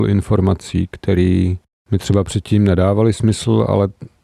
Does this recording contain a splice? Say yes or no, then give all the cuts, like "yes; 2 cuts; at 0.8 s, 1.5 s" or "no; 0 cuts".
no; 0 cuts